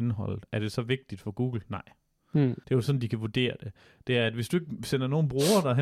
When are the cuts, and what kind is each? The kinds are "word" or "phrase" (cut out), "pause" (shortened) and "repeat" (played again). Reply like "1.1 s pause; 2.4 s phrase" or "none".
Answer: 2.6 s pause